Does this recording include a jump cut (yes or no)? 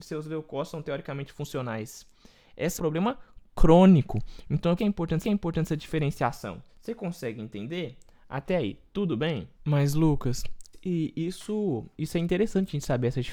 yes